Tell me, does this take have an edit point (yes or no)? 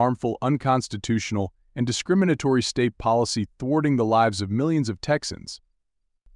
no